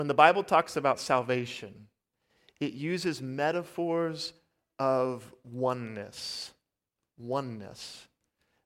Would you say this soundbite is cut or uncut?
uncut